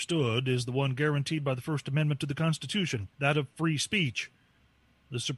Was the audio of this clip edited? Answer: yes; 1 cut; at 3.1 s

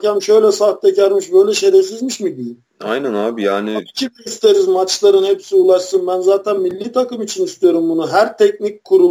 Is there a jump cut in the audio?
yes; 2 cuts; at 2.7 s, 4.2 s

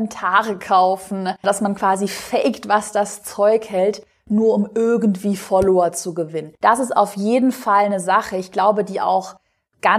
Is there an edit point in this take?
yes; 2 cuts; at 1.4 s, 6.6 s

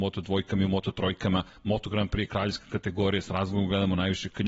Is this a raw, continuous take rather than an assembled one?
yes; 0 cuts

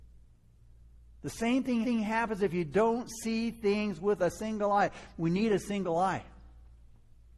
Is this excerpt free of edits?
no; 2 cuts; at 1.8 s, 4.2 s

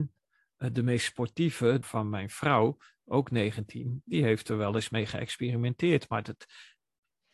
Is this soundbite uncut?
no; 2 cuts; at 1.8 s, 4.0 s

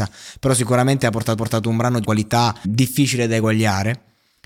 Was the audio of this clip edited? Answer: yes; 3 cuts; at 1.4 s, 2.0 s, 2.6 s

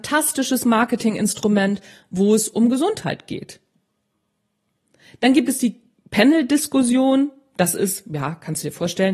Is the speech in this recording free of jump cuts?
yes; 0 cuts

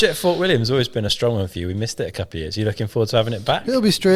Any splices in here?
no; 0 cuts

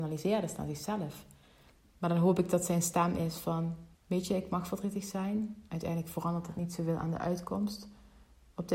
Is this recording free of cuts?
no; 1 cut; at 3.9 s

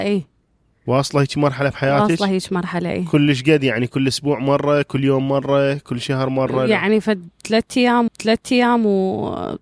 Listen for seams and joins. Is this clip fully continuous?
no; 1 cut; at 8.1 s

